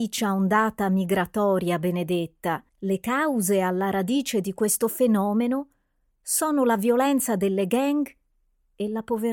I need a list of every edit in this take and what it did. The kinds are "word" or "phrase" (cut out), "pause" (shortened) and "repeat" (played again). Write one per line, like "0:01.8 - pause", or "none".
0:02.7 - pause